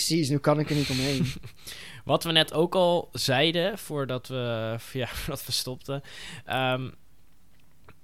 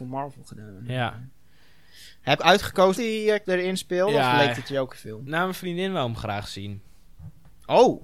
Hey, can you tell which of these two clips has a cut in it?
second; 4 cuts; at 2.4 s, 2.9 s, 3.5 s, 4.9 s

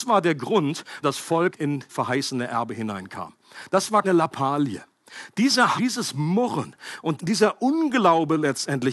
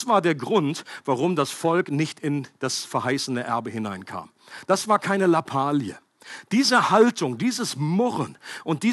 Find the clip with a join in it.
first; 6 cuts; at 1.0 s, 1.5 s, 1.9 s, 4.0 s, 5.8 s, 7.2 s

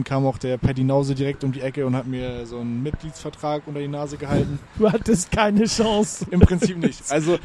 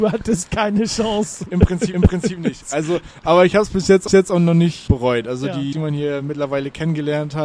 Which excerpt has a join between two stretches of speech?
second; 4 cuts; at 1.9 s, 4.1 s, 4.9 s, 5.7 s

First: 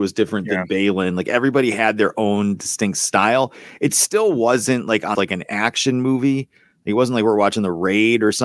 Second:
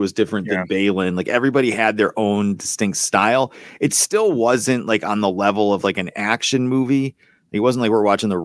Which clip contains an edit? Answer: first; 1 cut; at 5.1 s

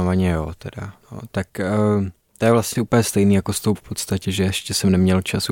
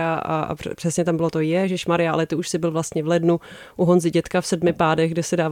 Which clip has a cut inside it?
first; 3 cuts; at 1.0 s, 2.8 s, 3.8 s

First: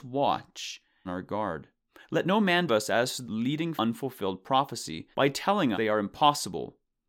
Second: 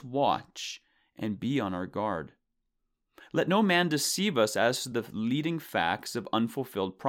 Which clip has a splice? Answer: first; 7 cuts; at 1.0 s, 1.9 s, 2.7 s, 3.2 s, 3.8 s, 5.1 s, 5.7 s

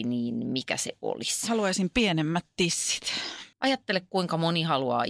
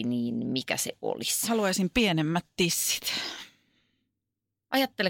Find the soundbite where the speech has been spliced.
first; 1 cut; at 3.5 s

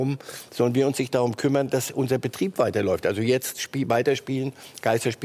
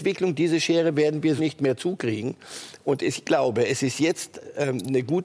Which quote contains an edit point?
second; 2 cuts; at 1.4 s, 3.2 s

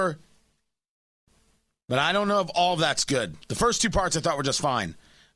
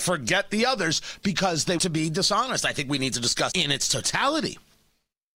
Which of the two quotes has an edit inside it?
second; 2 cuts; at 1.8 s, 3.5 s

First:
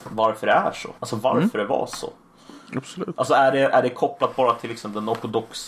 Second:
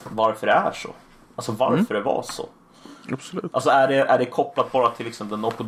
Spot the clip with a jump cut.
first; 1 cut; at 1.0 s

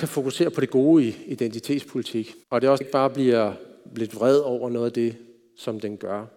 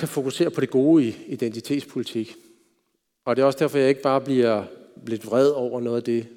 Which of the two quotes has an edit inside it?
first; 2 cuts; at 2.4 s, 2.8 s

